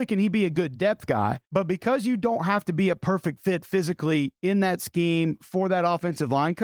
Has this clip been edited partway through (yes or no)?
yes